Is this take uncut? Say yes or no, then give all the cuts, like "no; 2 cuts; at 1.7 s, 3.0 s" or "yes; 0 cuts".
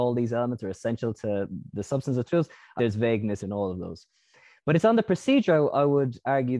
no; 3 cuts; at 2.3 s, 2.8 s, 3.4 s